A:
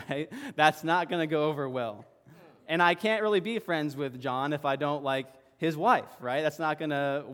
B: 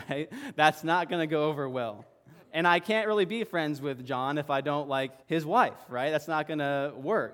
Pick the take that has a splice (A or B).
B